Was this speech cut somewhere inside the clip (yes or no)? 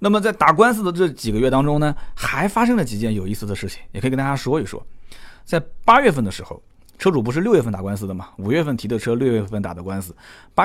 no